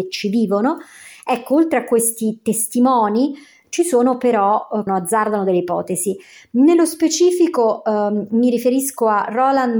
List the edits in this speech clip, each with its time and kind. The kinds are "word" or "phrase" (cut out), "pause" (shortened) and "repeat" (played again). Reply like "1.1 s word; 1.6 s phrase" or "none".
4.9 s phrase